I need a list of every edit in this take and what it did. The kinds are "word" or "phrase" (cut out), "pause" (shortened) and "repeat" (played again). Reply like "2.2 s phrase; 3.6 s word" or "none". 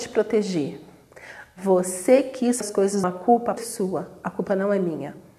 2.6 s word; 3.0 s phrase; 3.6 s phrase

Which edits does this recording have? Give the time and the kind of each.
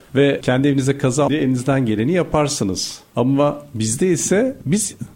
1.3 s word

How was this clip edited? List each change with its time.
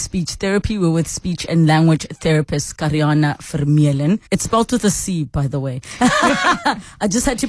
4.3 s pause

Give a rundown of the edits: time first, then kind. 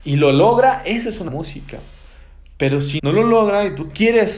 1.3 s word; 3.0 s word

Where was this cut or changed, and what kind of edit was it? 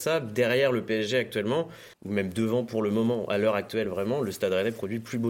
1.9 s pause

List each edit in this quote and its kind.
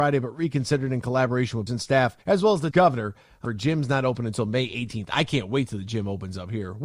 1.7 s word; 2.2 s pause; 2.7 s word; 3.4 s phrase

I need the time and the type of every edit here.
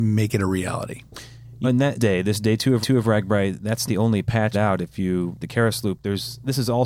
1.6 s word; 1.9 s word; 2.8 s repeat; 3.9 s word; 4.5 s phrase; 5.4 s word

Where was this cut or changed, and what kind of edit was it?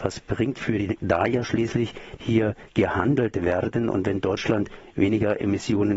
1.0 s word; 2.2 s phrase

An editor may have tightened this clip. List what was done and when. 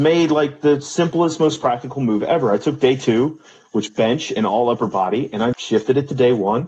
3.9 s word; 5.5 s word

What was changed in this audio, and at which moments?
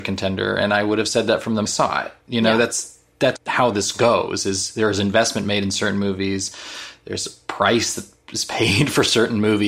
1.7 s phrase; 3.4 s word

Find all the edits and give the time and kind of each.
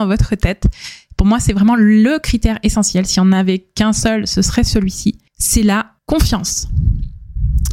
5.3 s pause; 6.0 s pause

